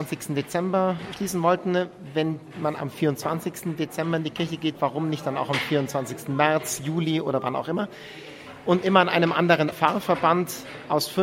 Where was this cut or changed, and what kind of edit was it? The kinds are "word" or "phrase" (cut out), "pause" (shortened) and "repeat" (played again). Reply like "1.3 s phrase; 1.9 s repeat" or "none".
9.7 s phrase